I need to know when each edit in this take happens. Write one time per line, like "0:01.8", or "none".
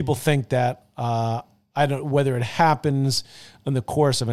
none

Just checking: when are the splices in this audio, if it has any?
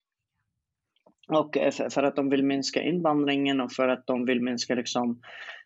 none

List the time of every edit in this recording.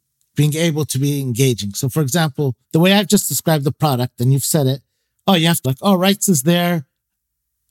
0:02.6
0:05.6

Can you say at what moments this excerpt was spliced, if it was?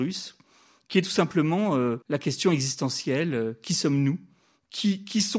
0:02.0

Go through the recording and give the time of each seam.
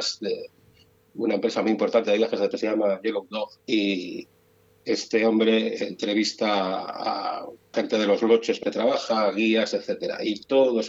0:02.5
0:03.6
0:07.7
0:08.6

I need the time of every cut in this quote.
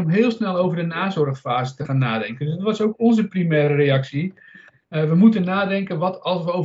none

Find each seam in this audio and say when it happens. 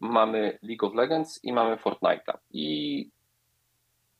0:02.4

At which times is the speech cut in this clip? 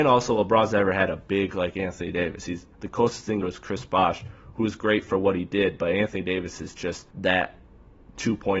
0:03.4
0:07.1

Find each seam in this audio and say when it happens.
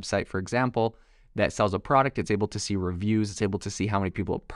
none

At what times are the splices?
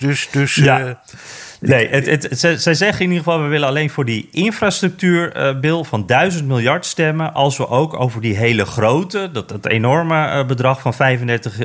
none

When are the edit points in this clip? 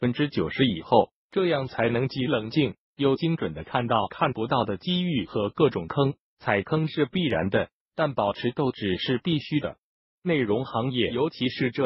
none

